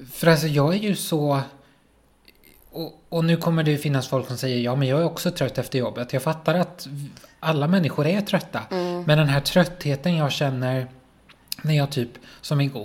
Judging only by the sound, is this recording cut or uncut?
uncut